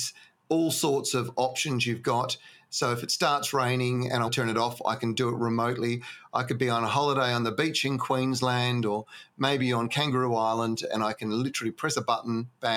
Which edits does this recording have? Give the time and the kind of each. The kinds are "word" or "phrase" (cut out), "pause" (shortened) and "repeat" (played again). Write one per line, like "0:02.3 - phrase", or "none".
0:04.3 - word